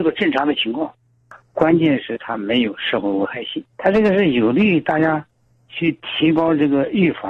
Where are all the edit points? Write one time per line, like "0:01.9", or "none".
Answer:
0:03.7
0:05.5